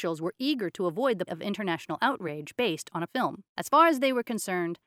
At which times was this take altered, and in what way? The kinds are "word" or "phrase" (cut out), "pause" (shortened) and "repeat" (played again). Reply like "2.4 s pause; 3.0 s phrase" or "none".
1.3 s word; 3.1 s word; 3.5 s pause